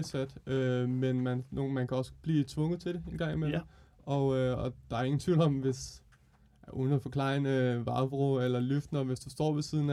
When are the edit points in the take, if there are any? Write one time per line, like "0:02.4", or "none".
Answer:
none